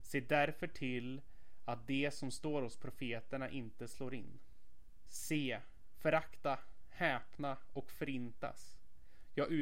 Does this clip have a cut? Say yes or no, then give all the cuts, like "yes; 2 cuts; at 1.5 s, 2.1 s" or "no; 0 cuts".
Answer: no; 0 cuts